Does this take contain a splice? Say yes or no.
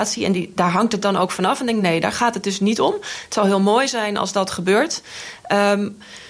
no